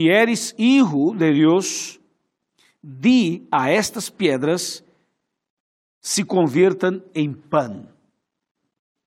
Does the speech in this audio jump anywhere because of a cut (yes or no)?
no